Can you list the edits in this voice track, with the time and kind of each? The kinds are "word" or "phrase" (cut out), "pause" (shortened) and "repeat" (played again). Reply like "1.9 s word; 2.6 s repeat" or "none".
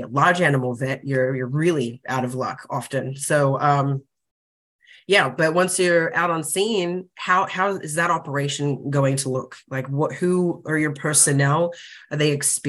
none